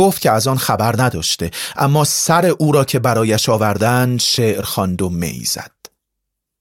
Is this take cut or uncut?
uncut